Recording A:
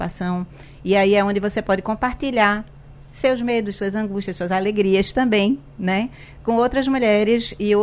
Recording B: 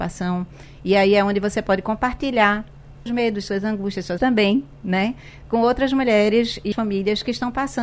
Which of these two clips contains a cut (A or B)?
B